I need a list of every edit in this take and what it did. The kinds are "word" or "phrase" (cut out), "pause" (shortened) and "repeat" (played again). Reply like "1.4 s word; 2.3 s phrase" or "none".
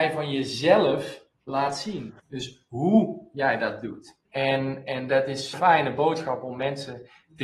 1.3 s pause; 2.2 s pause; 4.3 s pause; 5.5 s word